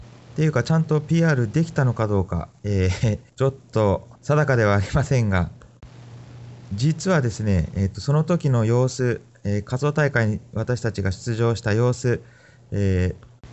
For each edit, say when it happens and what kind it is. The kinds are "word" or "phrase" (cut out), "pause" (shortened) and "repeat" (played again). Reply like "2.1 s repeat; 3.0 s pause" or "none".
3.3 s pause; 4.2 s pause